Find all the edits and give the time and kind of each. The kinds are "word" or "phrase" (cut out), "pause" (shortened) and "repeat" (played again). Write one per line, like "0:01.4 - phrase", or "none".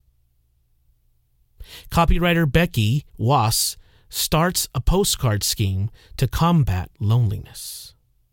0:03.1 - pause
0:06.9 - pause